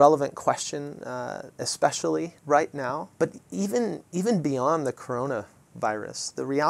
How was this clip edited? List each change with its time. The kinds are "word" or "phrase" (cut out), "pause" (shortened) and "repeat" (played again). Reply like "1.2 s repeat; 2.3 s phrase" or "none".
2.4 s pause; 3.1 s pause; 4.1 s pause